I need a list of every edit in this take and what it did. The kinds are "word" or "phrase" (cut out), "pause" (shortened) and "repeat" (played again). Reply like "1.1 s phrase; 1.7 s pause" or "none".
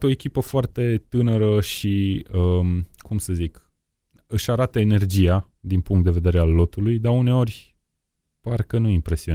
none

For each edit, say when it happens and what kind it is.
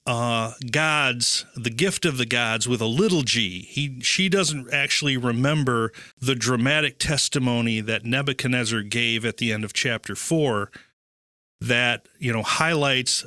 6.1 s pause

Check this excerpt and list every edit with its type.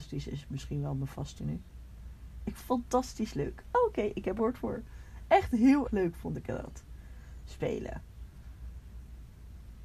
1.4 s word; 2.6 s word; 4.4 s phrase; 5.8 s word

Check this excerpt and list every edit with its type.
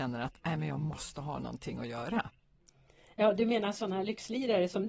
none

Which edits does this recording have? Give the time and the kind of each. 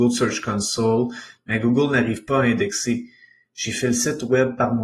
none

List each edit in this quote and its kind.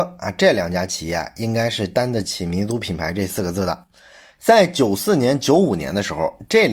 none

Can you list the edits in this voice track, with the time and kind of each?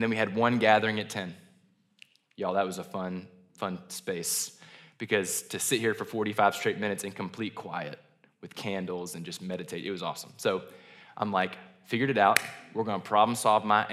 none

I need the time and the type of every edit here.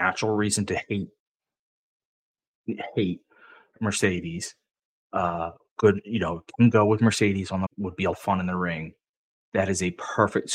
7.7 s word; 8.1 s word

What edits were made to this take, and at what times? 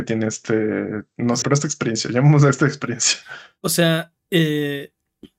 1.4 s phrase; 4.2 s pause

